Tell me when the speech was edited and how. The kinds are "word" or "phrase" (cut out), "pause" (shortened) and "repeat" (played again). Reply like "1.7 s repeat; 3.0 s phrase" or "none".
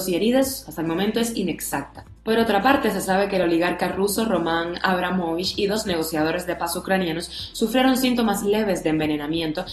none